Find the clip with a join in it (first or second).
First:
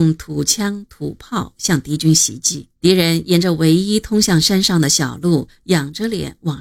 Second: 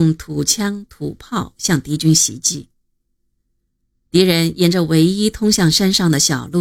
first